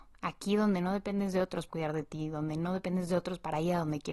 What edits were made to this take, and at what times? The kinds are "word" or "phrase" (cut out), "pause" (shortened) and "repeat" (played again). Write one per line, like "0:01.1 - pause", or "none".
0:01.7 - word